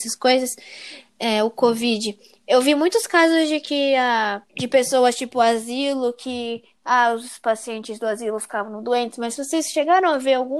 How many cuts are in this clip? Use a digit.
2